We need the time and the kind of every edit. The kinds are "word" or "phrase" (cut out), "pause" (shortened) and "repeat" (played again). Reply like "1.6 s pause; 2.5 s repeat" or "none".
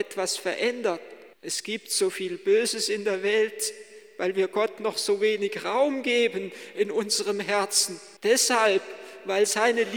1.3 s pause; 8.2 s pause